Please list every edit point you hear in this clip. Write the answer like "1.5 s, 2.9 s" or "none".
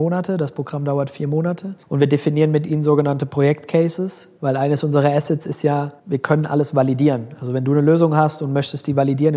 none